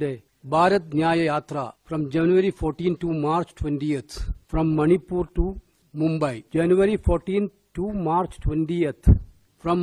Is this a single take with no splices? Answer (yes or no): no